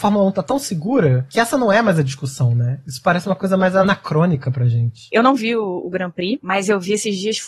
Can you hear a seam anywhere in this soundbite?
no; 0 cuts

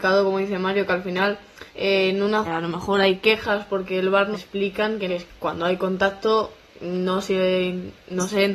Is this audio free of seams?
no; 4 cuts; at 1.7 s, 2.4 s, 4.3 s, 5.1 s

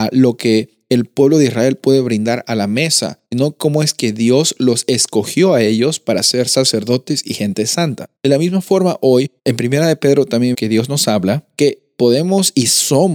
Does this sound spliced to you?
yes; 4 cuts; at 3.3 s, 8.2 s, 9.4 s, 10.5 s

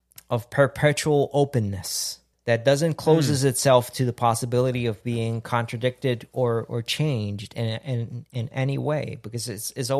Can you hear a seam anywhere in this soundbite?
yes; 1 cut; at 2.3 s

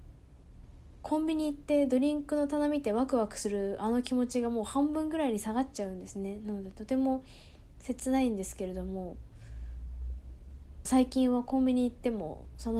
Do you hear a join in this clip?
yes; 1 cut; at 10.9 s

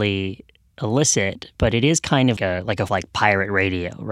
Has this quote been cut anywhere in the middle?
yes; 3 cuts; at 1.5 s, 2.4 s, 2.9 s

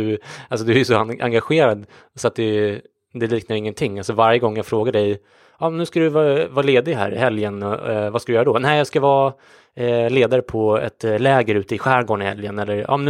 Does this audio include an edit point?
no; 0 cuts

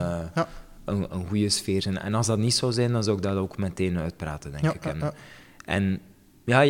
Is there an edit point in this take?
yes; 1 cut; at 1.1 s

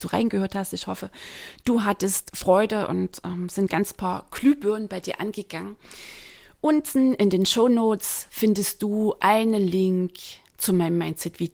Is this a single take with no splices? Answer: yes; 0 cuts

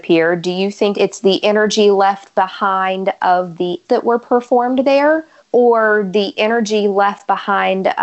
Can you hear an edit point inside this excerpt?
yes; 3 cuts; at 0.9 s, 3.8 s, 5.4 s

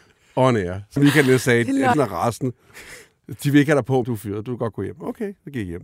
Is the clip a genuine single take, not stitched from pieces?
no; 3 cuts; at 1.0 s, 1.9 s, 4.0 s

